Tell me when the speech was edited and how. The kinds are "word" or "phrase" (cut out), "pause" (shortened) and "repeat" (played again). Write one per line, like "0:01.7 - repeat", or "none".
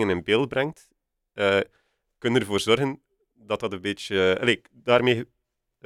none